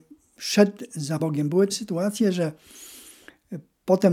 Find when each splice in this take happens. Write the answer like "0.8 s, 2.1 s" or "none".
1.2 s, 1.7 s